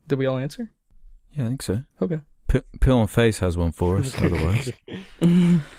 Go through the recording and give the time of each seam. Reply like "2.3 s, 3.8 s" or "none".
1.9 s